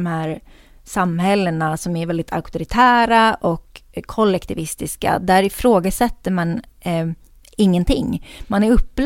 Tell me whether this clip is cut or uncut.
uncut